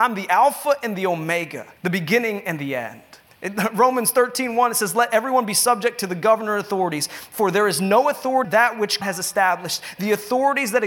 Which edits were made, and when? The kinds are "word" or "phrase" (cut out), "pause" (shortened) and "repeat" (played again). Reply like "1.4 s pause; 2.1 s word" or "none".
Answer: 1.8 s pause; 3.3 s pause; 8.4 s word; 9.0 s word